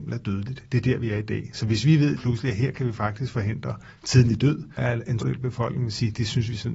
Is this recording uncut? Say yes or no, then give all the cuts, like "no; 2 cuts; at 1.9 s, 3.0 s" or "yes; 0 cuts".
no; 3 cuts; at 2.2 s, 4.8 s, 5.2 s